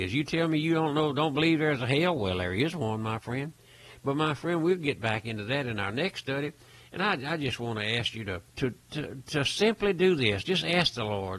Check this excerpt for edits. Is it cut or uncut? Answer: cut